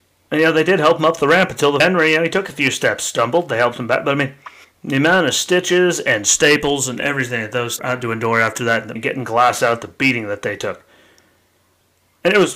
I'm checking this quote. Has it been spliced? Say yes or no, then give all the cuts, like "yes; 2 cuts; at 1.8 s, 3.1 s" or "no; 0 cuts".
yes; 4 cuts; at 1.8 s, 4.6 s, 7.8 s, 9.0 s